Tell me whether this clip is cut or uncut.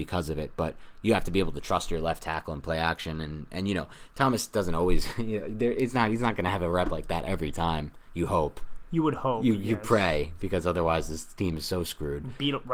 uncut